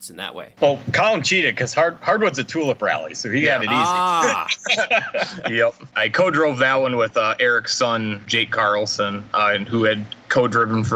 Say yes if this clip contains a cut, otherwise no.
no